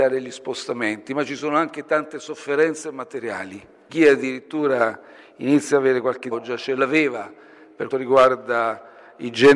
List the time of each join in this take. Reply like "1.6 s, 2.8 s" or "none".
3.9 s, 6.3 s, 7.9 s